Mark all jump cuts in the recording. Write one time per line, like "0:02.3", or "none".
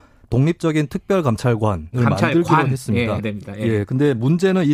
0:01.9
0:03.2